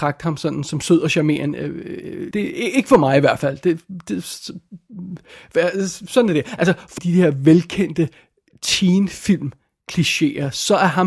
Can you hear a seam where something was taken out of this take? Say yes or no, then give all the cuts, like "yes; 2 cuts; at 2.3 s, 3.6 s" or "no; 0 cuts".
yes; 2 cuts; at 2.3 s, 7.0 s